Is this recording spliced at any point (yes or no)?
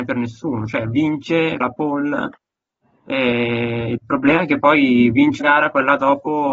yes